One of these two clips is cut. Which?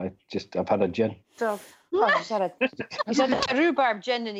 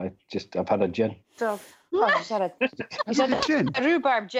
first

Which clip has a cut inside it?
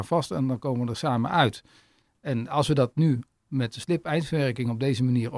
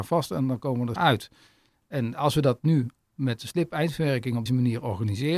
second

